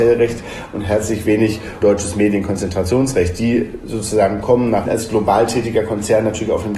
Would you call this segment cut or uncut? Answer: cut